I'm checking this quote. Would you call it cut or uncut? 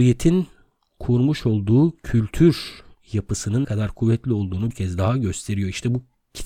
cut